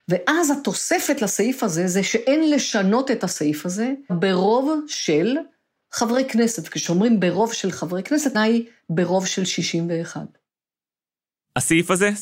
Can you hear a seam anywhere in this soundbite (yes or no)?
yes